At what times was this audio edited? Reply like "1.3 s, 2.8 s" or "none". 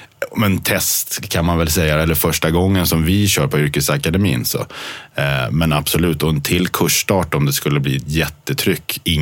none